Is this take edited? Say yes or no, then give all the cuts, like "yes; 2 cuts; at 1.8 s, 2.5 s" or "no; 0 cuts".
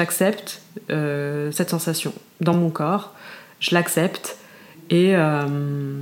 no; 0 cuts